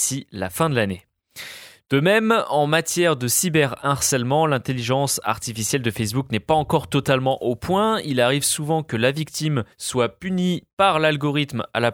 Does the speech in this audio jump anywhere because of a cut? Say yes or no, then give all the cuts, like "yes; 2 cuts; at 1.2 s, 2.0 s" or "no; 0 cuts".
yes; 1 cut; at 9.7 s